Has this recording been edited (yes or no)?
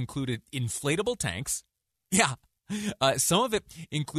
no